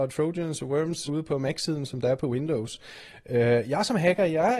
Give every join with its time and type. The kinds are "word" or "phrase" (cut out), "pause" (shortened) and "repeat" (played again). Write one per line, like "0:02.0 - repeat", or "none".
0:01.1 - word